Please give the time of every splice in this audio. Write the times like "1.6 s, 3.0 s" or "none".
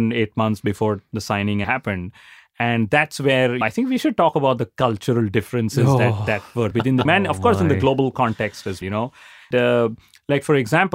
1.6 s, 3.6 s, 6.7 s, 7.1 s, 8.8 s, 9.5 s